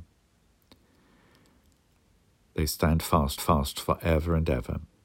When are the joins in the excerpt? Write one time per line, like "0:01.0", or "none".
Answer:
0:03.4